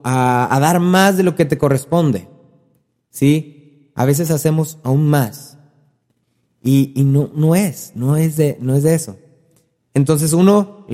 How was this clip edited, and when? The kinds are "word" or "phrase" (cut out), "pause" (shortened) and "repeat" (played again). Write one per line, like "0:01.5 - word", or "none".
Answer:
none